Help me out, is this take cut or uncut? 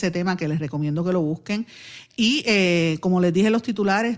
uncut